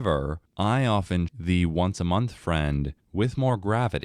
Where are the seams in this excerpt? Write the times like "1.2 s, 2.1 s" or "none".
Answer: 1.3 s